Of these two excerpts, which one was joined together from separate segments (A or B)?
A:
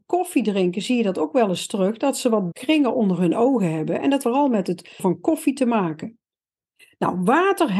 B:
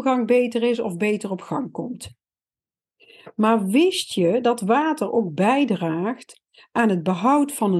A